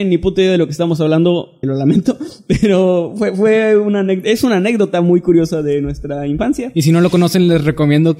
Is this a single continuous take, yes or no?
no